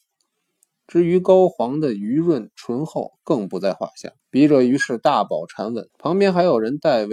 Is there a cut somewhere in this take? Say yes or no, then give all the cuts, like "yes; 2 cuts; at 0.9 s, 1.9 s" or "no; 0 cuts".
yes; 2 cuts; at 4.2 s, 5.9 s